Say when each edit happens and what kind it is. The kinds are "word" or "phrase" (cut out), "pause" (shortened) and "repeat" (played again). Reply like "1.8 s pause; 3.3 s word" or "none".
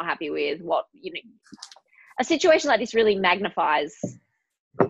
none